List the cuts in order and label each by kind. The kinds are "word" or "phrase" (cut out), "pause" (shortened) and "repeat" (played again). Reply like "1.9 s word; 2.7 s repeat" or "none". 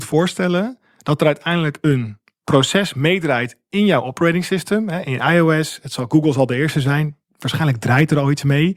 none